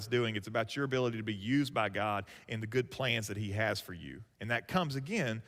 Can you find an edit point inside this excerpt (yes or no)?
yes